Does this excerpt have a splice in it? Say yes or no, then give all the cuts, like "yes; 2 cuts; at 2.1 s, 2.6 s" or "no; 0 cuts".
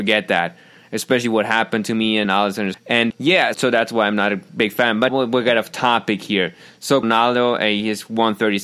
yes; 6 cuts; at 2.2 s, 2.7 s, 3.1 s, 3.5 s, 5.1 s, 7.0 s